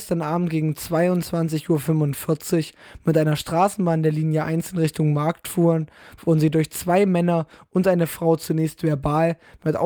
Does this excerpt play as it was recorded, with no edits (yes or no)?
yes